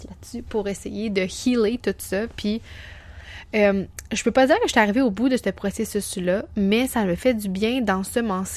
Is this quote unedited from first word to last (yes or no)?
yes